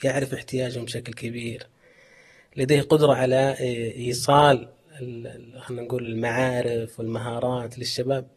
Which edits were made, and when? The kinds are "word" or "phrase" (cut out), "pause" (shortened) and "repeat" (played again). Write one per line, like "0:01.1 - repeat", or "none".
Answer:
none